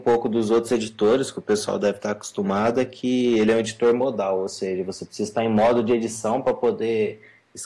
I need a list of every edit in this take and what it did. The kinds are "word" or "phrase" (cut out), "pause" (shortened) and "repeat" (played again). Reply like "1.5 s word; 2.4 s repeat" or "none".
none